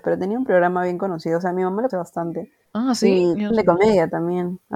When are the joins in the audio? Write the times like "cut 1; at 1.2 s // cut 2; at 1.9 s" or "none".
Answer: cut 1; at 1.9 s // cut 2; at 2.6 s // cut 3; at 3.5 s